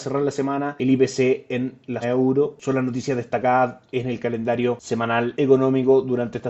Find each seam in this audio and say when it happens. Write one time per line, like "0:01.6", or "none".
0:02.0